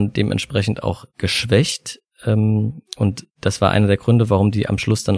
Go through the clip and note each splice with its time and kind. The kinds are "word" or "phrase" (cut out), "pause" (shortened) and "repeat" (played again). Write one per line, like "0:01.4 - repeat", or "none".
0:03.3 - pause

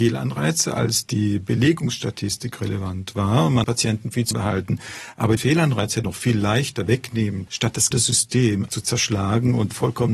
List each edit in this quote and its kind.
0:03.6 - word
0:04.3 - word
0:05.4 - word
0:06.0 - word
0:07.5 - word
0:07.9 - word
0:08.7 - word

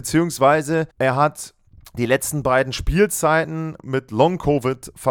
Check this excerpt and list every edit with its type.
0:00.9 - pause
0:01.7 - pause

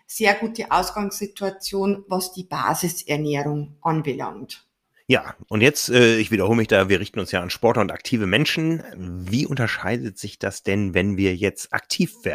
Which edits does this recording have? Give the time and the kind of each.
none

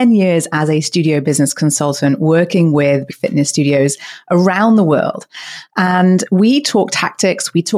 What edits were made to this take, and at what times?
0:03.1 - word

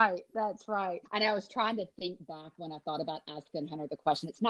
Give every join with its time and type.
0:01.0 - pause

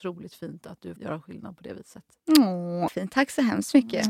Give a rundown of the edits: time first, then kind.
0:01.0 - word
0:02.9 - word

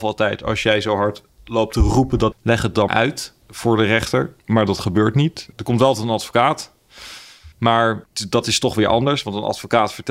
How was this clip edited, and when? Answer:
0:02.3 - phrase
0:02.9 - word
0:04.4 - pause
0:05.5 - pause
0:07.5 - pause

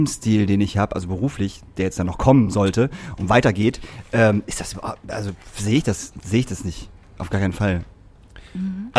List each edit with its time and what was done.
none

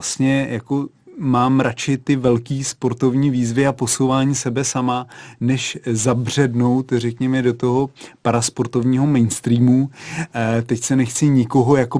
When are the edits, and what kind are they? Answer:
none

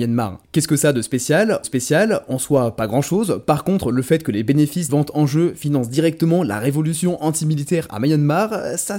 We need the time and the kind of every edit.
0:01.6 - repeat
0:04.9 - word

